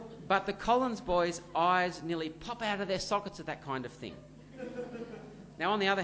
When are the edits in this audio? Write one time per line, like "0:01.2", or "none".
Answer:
none